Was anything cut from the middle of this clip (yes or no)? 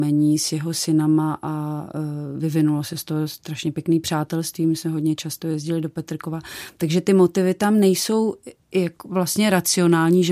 no